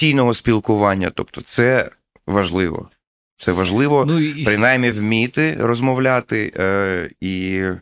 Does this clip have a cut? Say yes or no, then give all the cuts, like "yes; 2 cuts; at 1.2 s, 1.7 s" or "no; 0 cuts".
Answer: no; 0 cuts